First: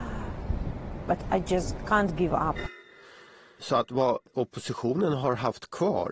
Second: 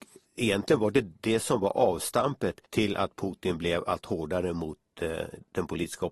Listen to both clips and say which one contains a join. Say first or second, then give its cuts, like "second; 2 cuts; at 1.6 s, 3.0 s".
second; 1 cut; at 2.7 s